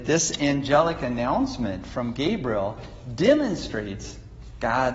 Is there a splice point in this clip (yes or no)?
no